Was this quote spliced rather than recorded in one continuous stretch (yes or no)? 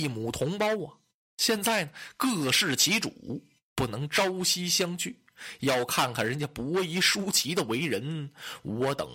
no